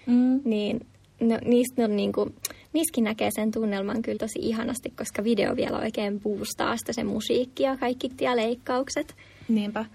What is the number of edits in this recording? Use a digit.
2